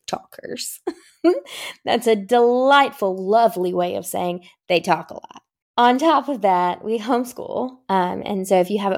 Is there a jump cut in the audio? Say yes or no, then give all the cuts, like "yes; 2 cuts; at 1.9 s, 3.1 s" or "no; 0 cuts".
yes; 1 cut; at 5.6 s